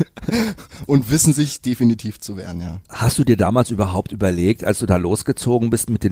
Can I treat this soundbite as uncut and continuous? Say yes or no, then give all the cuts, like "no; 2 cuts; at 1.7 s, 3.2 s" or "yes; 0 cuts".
no; 1 cut; at 2.8 s